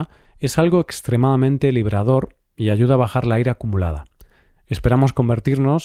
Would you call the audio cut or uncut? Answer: uncut